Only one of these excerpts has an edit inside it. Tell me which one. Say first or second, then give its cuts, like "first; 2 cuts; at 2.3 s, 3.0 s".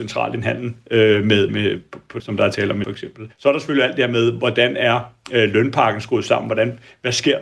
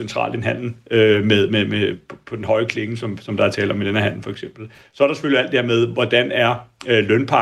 first; 4 cuts; at 1.5 s, 2.2 s, 2.8 s, 3.3 s